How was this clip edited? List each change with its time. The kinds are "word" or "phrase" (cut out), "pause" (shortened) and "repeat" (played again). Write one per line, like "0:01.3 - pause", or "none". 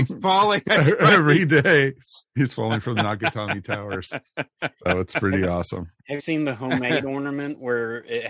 0:06.2 - word